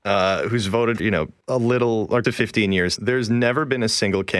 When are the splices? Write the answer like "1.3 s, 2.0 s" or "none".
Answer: 1.0 s, 1.4 s, 2.2 s, 3.0 s